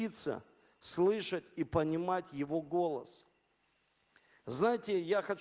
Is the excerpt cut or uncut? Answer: uncut